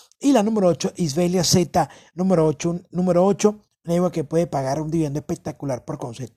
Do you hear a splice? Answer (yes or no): no